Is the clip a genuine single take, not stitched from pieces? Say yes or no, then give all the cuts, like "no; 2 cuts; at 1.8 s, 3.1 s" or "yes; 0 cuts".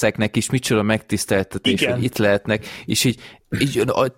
yes; 0 cuts